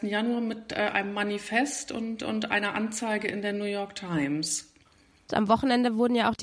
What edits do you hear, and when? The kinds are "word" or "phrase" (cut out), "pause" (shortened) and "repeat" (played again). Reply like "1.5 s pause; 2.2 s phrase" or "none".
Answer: none